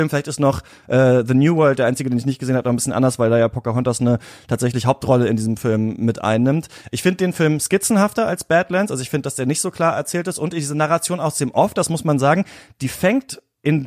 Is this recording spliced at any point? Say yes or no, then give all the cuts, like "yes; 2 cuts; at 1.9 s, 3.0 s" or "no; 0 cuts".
no; 0 cuts